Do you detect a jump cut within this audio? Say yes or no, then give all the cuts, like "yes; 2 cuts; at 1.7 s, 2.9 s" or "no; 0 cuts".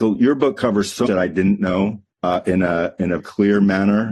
yes; 3 cuts; at 1.1 s, 2.1 s, 3.2 s